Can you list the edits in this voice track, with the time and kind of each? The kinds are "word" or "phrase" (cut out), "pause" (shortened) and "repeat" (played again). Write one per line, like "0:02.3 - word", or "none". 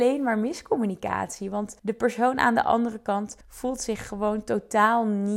0:01.8 - pause
0:03.4 - pause

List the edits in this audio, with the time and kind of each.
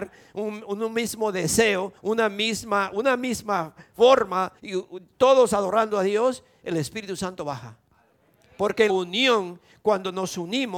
0:02.0 - pause
0:04.6 - pause
0:08.9 - word

